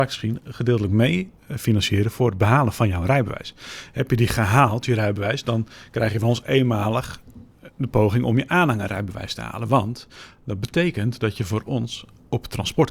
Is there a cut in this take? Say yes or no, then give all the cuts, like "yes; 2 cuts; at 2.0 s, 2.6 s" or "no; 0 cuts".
yes; 1 cut; at 1.4 s